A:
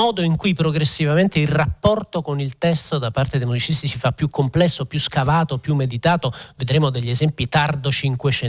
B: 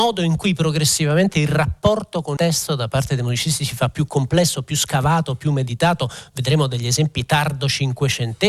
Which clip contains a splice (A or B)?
B